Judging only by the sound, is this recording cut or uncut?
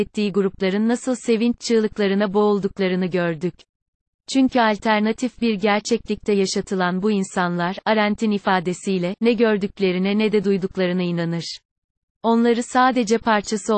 uncut